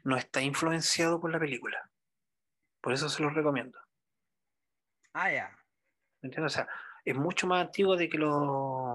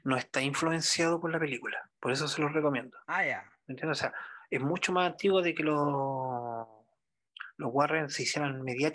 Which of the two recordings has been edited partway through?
second; 3 cuts; at 2.0 s, 3.0 s, 3.6 s

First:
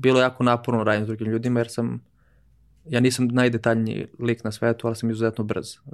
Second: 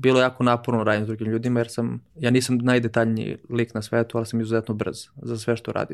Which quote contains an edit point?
second; 1 cut; at 2.1 s

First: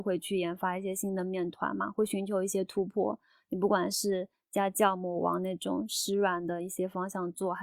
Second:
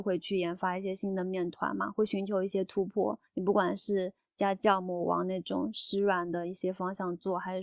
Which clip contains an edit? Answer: second; 1 cut; at 3.3 s

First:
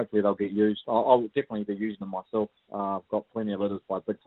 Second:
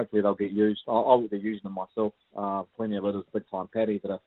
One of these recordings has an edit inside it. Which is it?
second; 3 cuts; at 1.3 s, 2.7 s, 3.3 s

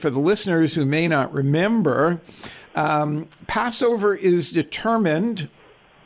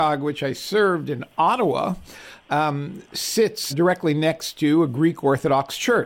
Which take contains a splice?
second; 1 cut; at 3.7 s

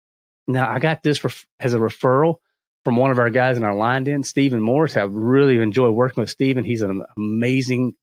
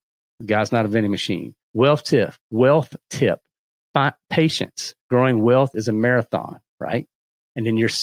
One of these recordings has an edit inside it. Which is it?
second; 3 cuts; at 1.6 s, 2.4 s, 5.0 s

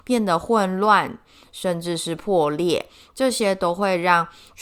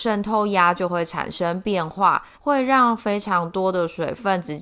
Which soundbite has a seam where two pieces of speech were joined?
second; 1 cut; at 2.3 s

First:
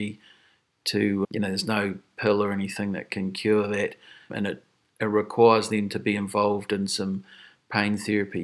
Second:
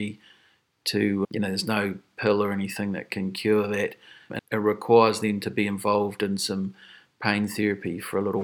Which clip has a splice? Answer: second; 1 cut; at 4.4 s

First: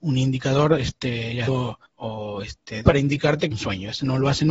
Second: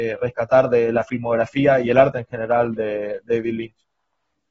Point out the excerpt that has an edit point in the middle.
first; 4 cuts; at 1.5 s, 1.9 s, 2.8 s, 3.5 s

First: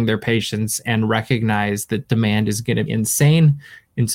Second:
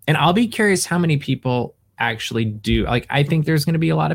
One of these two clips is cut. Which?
first; 1 cut; at 2.9 s

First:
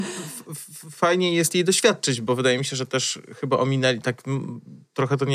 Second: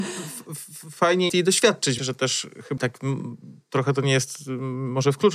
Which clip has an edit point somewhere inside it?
second; 3 cuts; at 1.3 s, 2.0 s, 2.8 s

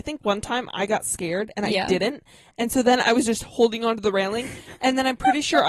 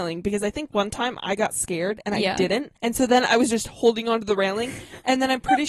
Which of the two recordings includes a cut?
second; 1 cut; at 2.8 s

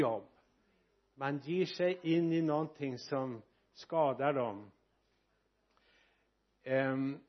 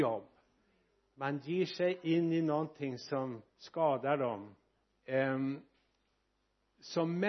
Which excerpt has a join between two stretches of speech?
second; 2 cuts; at 3.5 s, 4.8 s

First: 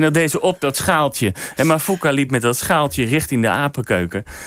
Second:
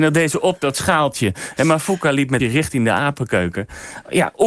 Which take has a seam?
second; 1 cut; at 2.4 s

